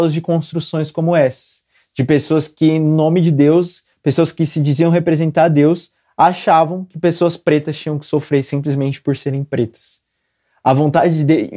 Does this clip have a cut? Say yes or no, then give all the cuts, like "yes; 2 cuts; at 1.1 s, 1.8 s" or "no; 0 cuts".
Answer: no; 0 cuts